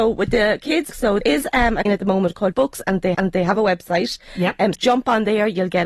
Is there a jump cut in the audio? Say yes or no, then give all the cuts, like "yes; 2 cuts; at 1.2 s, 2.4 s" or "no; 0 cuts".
yes; 6 cuts; at 0.9 s, 1.2 s, 1.9 s, 2.5 s, 3.1 s, 4.7 s